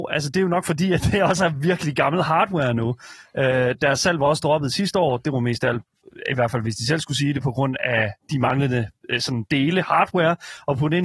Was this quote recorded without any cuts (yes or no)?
no